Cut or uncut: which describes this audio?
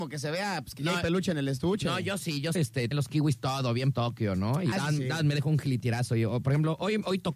cut